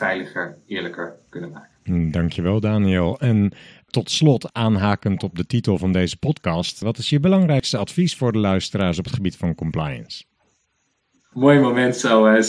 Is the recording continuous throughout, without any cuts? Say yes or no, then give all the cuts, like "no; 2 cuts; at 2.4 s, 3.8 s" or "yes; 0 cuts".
yes; 0 cuts